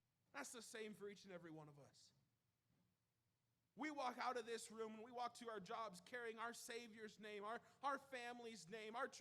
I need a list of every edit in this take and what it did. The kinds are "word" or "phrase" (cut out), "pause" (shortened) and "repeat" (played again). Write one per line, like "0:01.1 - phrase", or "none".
none